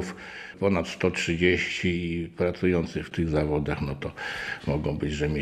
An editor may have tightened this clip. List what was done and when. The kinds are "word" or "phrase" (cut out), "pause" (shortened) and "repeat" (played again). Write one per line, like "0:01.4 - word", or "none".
none